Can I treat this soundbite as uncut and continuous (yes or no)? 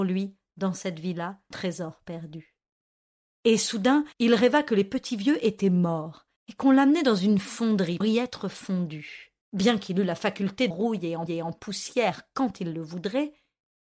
no